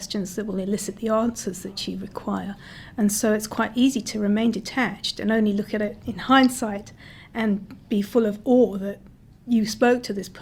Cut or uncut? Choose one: uncut